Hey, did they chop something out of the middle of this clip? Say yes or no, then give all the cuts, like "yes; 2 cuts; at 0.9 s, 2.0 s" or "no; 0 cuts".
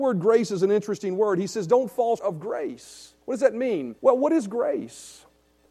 yes; 3 cuts; at 2.2 s, 3.2 s, 4.0 s